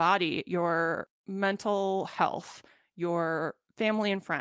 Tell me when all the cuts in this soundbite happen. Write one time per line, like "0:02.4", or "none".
none

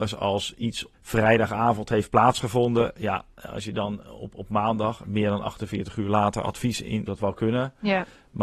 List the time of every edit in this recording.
0:00.9
0:07.1

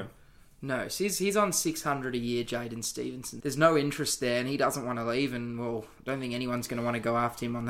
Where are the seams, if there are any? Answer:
0:03.4

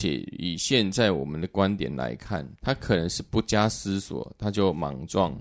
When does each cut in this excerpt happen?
0:02.6

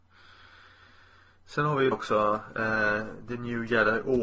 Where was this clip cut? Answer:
0:01.9

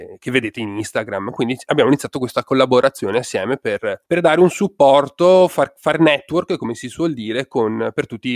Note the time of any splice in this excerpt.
0:04.1

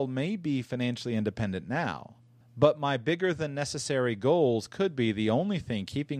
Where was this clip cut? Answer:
0:02.4

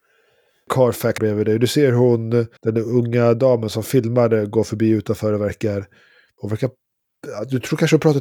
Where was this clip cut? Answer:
0:01.2
0:02.6

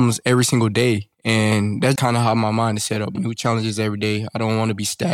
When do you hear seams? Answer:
0:01.1
0:02.0
0:03.2

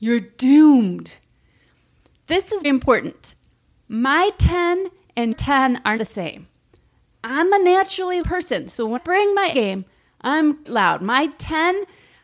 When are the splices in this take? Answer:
0:02.6
0:05.3
0:06.0
0:08.2
0:09.0
0:09.5
0:10.7

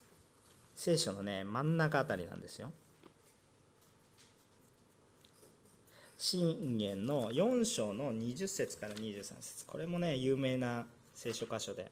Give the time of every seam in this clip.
none

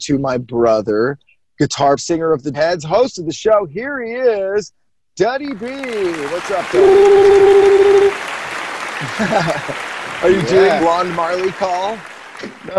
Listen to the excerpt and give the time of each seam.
0:02.0
0:02.5
0:10.8

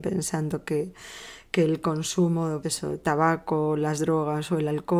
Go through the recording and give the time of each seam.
0:02.6

